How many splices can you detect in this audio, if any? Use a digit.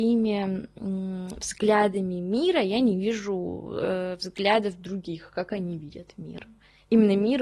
0